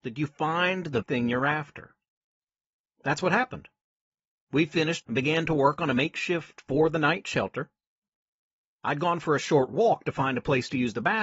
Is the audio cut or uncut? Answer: cut